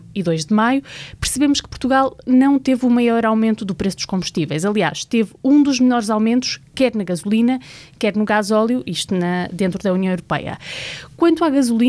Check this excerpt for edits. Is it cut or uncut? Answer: uncut